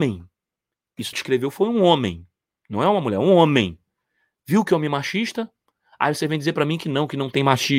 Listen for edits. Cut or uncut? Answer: cut